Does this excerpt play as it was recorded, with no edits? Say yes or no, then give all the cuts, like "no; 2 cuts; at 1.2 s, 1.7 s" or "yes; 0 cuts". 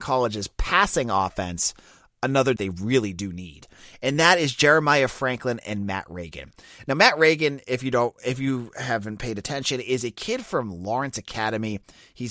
no; 1 cut; at 2.6 s